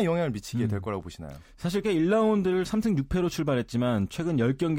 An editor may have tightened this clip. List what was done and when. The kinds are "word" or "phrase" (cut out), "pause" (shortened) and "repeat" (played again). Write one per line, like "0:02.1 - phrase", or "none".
0:01.8 - word